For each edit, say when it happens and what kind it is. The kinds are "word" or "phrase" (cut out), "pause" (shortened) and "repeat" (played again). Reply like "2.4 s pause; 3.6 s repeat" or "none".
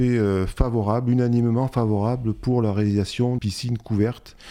3.4 s word